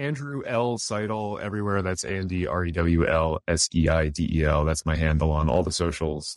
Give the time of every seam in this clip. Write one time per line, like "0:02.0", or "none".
none